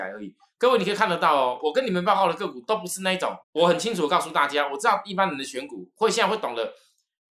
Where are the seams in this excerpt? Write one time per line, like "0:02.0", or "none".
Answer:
0:03.4